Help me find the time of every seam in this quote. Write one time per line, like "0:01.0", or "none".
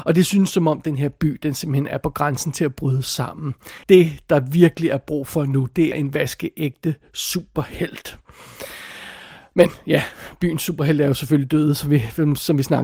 0:03.8
0:05.9